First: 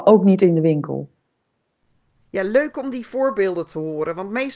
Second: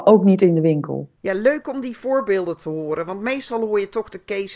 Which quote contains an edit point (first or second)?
second